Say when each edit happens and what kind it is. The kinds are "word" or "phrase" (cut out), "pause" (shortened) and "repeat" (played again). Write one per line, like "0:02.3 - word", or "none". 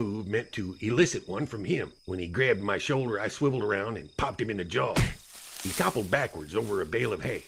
0:02.0 - pause